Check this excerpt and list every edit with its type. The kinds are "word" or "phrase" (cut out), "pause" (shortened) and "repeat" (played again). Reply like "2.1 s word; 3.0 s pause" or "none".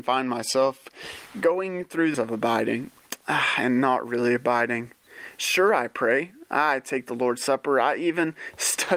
2.1 s word